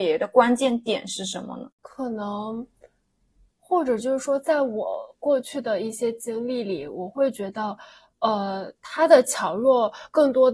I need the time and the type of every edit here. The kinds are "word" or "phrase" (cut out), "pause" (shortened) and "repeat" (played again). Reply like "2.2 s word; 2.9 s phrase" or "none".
none

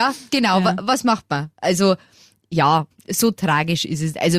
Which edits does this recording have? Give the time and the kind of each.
2.9 s word

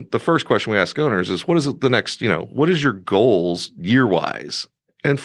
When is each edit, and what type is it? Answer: none

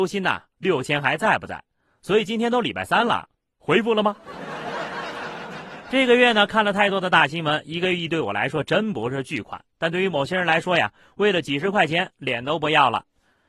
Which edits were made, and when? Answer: none

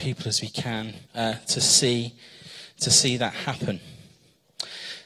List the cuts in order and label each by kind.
1.0 s pause

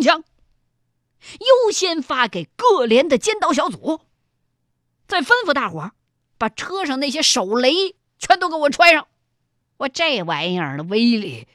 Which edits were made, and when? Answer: none

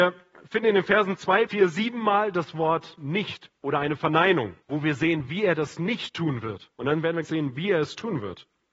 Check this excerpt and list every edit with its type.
1.5 s word; 3.6 s pause; 4.6 s pause; 6.7 s pause; 7.2 s word

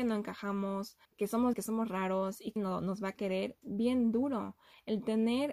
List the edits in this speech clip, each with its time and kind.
1.0 s pause; 1.5 s word; 2.6 s word; 3.6 s word

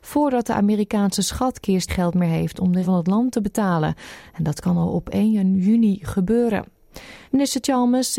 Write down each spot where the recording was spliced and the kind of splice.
1.9 s word; 2.8 s word; 7.3 s pause

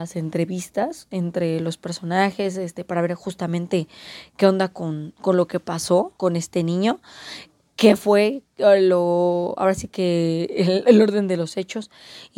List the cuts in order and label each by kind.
6.2 s word

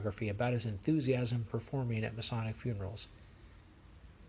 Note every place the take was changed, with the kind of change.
1.4 s word

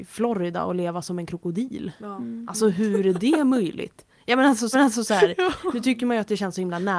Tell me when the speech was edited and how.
4.7 s repeat

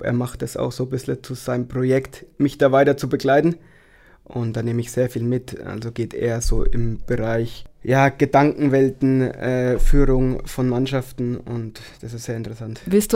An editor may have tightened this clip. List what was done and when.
none

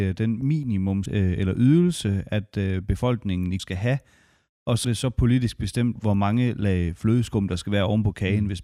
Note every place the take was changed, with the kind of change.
1.1 s word; 3.6 s word; 4.8 s word; 6.0 s word

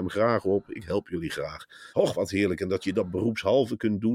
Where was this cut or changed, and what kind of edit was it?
1.9 s pause

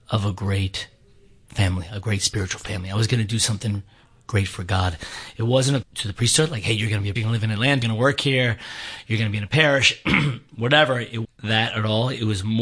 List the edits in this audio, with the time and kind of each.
1.5 s word; 5.8 s word; 7.2 s word; 7.8 s word; 11.2 s word

